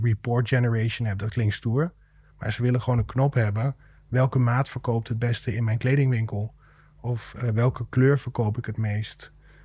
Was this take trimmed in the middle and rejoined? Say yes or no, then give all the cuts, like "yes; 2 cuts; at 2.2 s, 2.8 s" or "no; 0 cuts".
no; 0 cuts